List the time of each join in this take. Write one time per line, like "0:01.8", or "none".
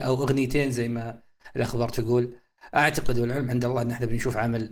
none